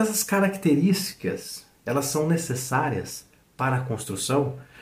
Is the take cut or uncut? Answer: uncut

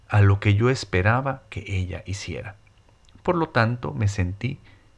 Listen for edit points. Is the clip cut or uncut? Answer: uncut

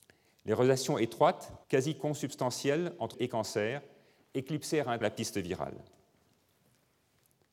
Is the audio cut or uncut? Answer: cut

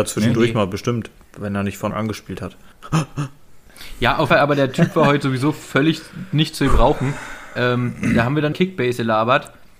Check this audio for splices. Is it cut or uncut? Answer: cut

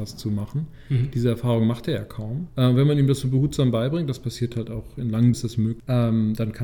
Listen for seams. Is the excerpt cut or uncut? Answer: cut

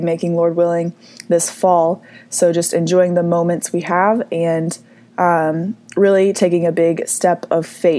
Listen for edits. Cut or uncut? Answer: uncut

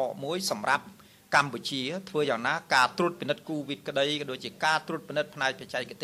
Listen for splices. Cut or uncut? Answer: uncut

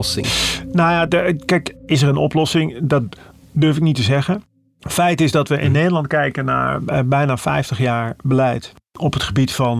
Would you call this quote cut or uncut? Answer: uncut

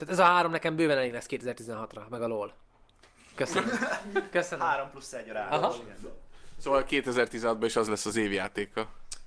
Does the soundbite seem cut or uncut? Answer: uncut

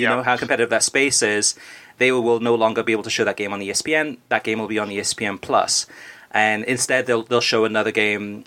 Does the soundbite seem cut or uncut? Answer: uncut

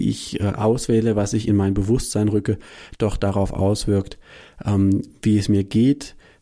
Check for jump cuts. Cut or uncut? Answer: uncut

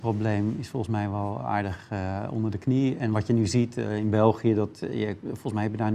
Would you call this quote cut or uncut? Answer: uncut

